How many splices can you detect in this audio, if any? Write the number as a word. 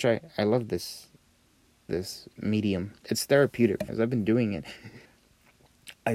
four